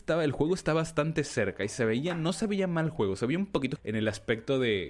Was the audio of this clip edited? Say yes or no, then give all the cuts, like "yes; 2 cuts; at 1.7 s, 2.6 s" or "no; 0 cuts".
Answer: yes; 1 cut; at 3.8 s